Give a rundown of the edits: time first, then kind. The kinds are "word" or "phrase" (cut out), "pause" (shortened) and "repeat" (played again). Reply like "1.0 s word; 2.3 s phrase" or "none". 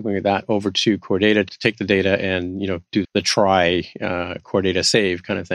3.0 s word